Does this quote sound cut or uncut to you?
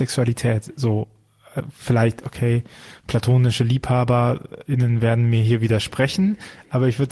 uncut